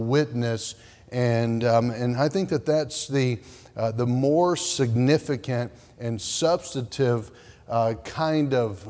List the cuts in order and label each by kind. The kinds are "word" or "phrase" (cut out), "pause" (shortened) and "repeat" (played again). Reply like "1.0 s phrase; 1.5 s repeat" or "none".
none